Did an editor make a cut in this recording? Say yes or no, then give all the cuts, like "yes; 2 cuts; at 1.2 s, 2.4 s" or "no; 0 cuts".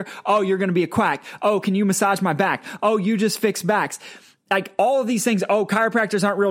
no; 0 cuts